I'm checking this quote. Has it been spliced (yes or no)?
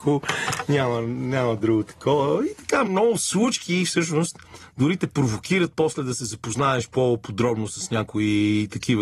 yes